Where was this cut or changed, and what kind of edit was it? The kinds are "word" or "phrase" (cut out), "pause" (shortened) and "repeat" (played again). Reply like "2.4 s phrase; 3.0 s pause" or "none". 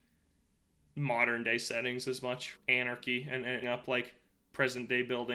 2.5 s word; 3.6 s phrase

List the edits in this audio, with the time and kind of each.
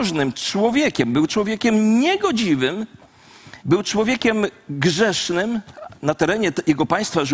3.6 s pause

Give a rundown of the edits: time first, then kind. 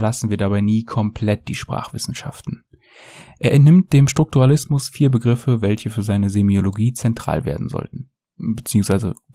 none

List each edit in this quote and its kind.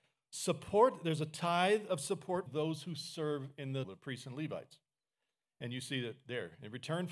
2.5 s word; 3.8 s word

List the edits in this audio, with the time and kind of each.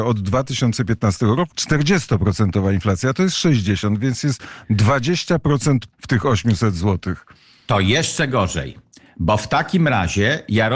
1.5 s word; 5.9 s word

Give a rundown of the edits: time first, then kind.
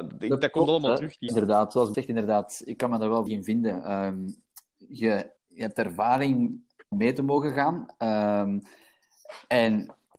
1.3 s word; 1.9 s word; 3.3 s word; 5.4 s word; 6.9 s word

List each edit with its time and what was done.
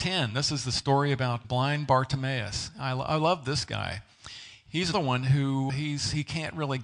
1.4 s word; 4.9 s word; 5.7 s word

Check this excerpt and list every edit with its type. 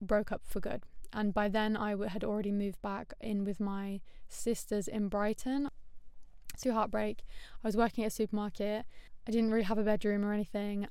6.6 s phrase

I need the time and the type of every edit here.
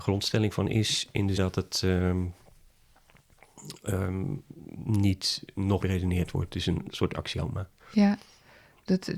1.4 s word; 5.8 s word; 7.8 s pause

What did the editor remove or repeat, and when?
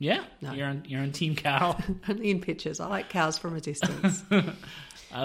none

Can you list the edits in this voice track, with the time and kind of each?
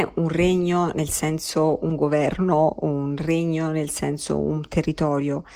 none

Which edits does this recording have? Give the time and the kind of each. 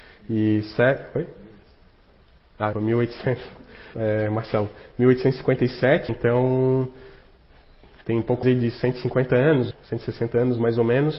2.7 s word; 3.9 s word; 6.1 s word; 8.4 s word; 9.7 s word

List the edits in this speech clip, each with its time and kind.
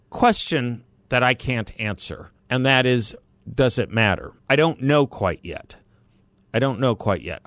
2.4 s pause; 4.4 s pause

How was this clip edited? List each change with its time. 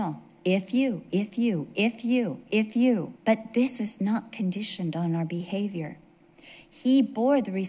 3.2 s pause

